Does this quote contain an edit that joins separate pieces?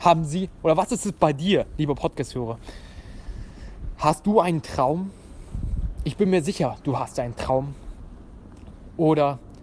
no; 0 cuts

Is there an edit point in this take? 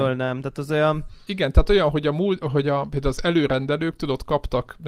no; 0 cuts

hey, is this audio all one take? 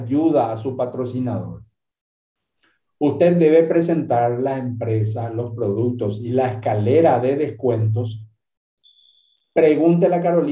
yes; 0 cuts

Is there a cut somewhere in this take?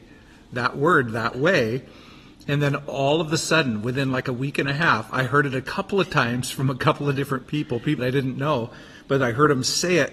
yes; 1 cut; at 8.0 s

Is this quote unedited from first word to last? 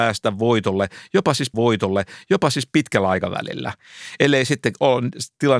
no; 1 cut; at 1.5 s

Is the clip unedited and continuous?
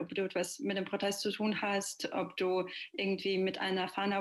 yes; 0 cuts

